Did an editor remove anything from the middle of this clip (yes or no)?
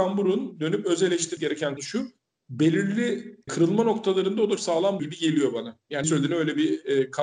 yes